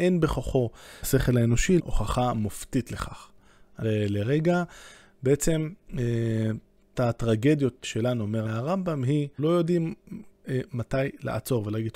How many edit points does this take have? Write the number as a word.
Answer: seven